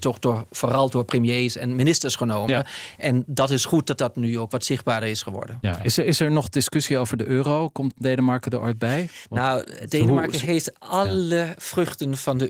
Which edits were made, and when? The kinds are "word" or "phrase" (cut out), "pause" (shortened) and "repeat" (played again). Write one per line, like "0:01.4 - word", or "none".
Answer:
none